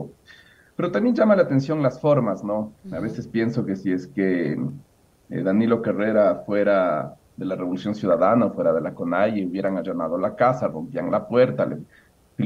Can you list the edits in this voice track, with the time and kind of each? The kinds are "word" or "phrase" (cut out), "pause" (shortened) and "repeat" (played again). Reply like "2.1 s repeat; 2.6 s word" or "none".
none